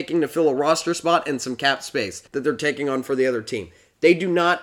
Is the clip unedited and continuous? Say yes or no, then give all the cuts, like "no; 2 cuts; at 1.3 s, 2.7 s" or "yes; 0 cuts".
no; 1 cut; at 2.3 s